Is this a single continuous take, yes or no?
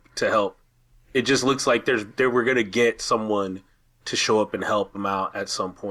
yes